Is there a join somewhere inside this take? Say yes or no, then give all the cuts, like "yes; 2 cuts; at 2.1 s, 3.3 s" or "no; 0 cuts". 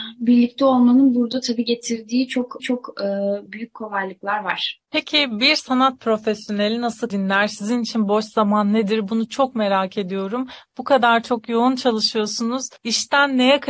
yes; 3 cuts; at 2.6 s, 7.1 s, 12.8 s